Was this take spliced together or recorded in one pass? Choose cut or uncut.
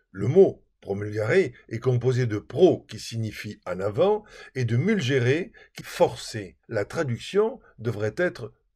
cut